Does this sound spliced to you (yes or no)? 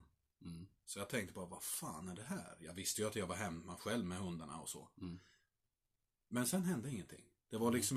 no